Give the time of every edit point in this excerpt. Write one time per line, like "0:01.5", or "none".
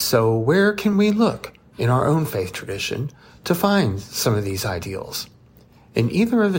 none